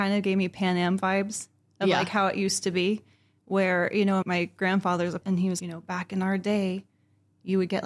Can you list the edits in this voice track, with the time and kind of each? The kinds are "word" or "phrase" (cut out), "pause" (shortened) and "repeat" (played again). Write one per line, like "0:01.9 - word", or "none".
0:04.2 - word
0:05.2 - word
0:05.6 - word